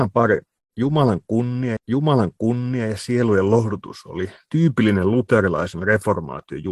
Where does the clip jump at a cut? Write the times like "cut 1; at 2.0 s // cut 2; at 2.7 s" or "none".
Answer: cut 1; at 1.8 s